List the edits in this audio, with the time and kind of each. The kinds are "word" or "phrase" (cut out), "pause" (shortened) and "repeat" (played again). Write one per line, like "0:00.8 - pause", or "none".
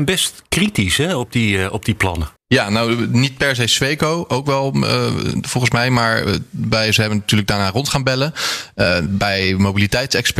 0:02.4 - pause